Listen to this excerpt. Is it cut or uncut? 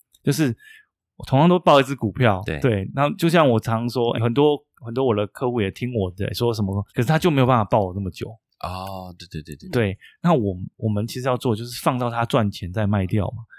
cut